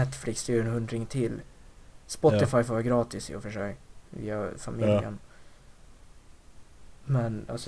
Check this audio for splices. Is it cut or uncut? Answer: uncut